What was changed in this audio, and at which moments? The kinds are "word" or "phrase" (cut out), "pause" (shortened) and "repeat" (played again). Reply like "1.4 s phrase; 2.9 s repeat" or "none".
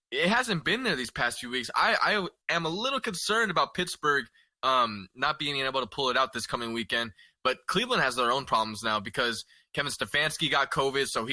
2.4 s pause

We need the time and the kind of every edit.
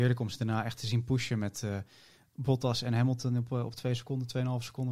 none

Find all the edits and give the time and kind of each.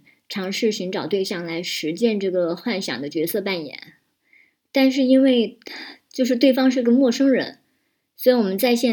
none

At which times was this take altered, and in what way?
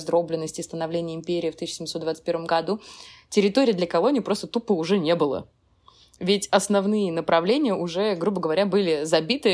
none

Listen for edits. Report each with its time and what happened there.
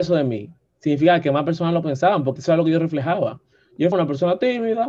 2.4 s word; 3.9 s word

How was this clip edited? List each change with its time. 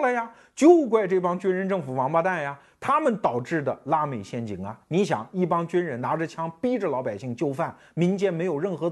none

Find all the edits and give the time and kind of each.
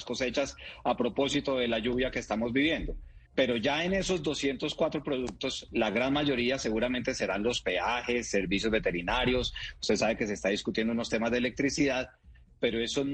3.2 s pause

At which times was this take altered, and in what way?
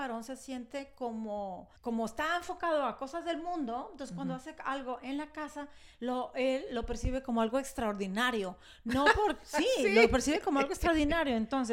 1.8 s pause

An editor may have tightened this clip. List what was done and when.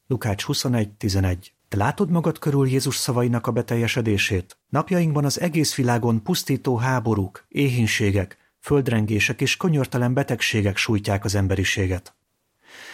1.6 s pause; 4.6 s pause

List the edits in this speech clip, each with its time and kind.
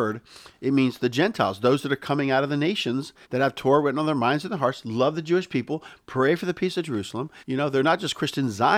3.2 s pause; 7.4 s pause

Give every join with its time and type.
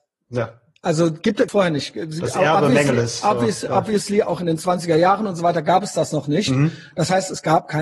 1.5 s phrase

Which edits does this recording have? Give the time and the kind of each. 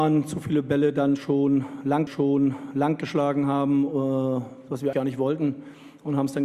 2.1 s repeat; 4.9 s word

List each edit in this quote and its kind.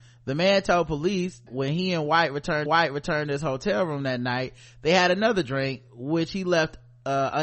1.5 s word; 2.7 s repeat

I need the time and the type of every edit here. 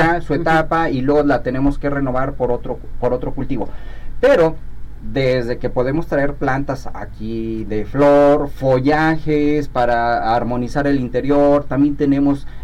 none

